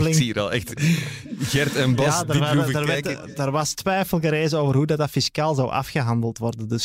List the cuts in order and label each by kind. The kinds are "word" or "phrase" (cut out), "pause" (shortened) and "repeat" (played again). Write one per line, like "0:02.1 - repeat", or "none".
none